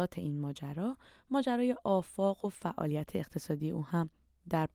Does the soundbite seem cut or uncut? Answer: uncut